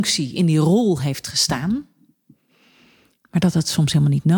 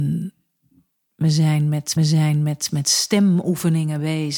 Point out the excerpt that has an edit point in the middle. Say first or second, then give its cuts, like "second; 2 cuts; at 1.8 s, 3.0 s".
second; 1 cut; at 2.0 s